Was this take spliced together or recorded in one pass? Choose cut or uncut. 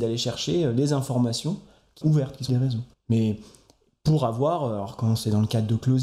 cut